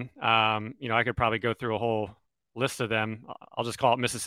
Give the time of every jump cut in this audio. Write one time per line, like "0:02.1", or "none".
none